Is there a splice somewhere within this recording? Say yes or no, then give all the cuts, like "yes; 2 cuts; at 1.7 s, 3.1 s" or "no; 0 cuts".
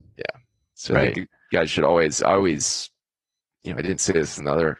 no; 0 cuts